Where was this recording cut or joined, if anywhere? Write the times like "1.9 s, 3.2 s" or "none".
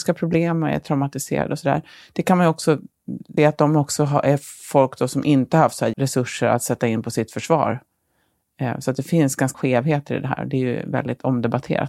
3.4 s, 5.9 s, 9.5 s